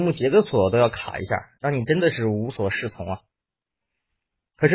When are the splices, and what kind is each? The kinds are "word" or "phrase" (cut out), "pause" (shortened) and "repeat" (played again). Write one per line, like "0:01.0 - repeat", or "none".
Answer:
none

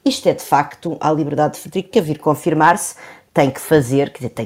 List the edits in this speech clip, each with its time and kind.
0:01.0 - phrase
0:01.9 - word

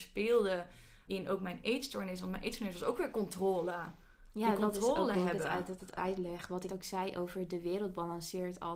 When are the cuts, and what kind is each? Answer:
0:01.1 - word
0:05.8 - word
0:06.7 - word

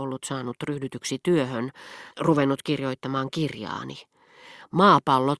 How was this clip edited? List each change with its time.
0:02.1 - pause

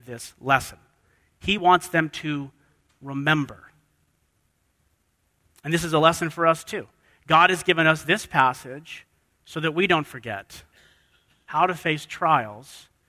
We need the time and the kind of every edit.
none

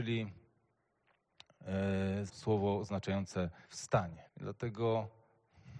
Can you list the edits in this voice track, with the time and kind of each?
0:02.3 - word
0:03.6 - pause
0:04.3 - pause

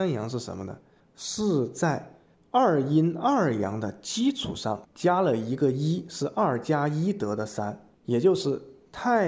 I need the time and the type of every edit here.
0:01.0 - pause
0:04.8 - pause
0:07.9 - pause

